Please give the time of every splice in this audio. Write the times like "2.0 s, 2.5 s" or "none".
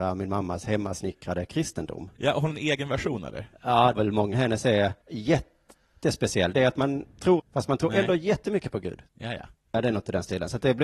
2.2 s, 2.5 s, 3.9 s, 4.3 s, 5.0 s, 7.4 s, 9.1 s

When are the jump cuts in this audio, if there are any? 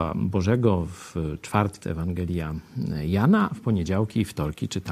1.8 s, 3.5 s

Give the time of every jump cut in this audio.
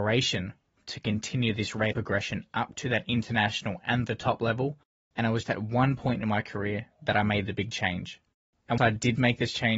1.9 s, 5.4 s, 8.8 s

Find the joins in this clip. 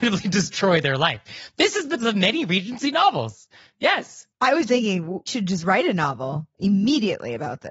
2.0 s, 4.7 s, 5.3 s

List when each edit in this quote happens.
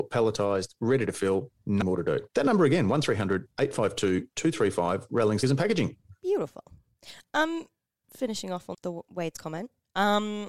1.8 s, 2.3 s, 5.4 s, 8.0 s, 8.7 s

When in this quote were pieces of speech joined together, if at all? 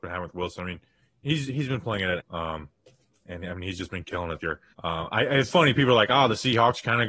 2.2 s, 4.4 s, 4.7 s, 5.5 s

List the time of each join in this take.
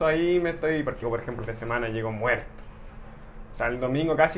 1.0 s, 1.5 s

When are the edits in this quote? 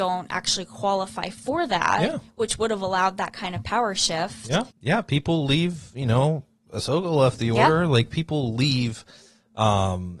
4.7 s

